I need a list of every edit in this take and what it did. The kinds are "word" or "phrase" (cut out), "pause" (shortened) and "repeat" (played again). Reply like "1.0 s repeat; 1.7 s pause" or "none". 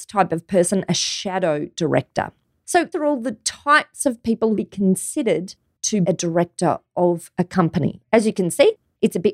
2.9 s word; 4.6 s word; 6.0 s word